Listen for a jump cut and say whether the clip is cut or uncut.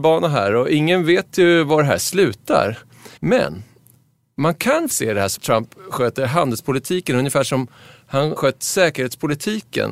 cut